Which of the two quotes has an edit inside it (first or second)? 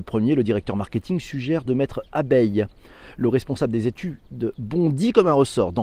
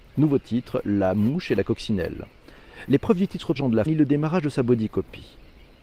second